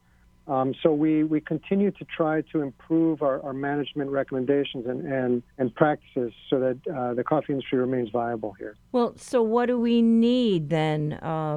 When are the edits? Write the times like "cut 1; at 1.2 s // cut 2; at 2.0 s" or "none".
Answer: cut 1; at 5.5 s // cut 2; at 8.9 s